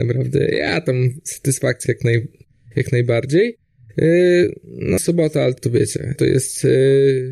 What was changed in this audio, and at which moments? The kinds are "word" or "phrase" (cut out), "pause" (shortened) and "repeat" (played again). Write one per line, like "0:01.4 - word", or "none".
0:01.9 - word
0:05.0 - word
0:05.6 - word
0:06.2 - word